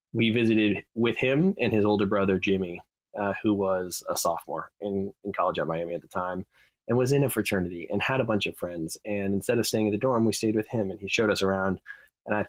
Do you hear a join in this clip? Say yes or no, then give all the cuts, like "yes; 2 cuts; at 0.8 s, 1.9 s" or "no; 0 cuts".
no; 0 cuts